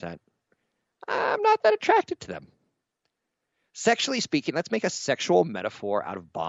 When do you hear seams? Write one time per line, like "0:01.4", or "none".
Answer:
none